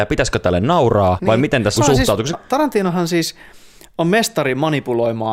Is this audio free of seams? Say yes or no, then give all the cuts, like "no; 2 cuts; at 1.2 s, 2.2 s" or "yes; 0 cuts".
no; 3 cuts; at 1.2 s, 1.8 s, 2.3 s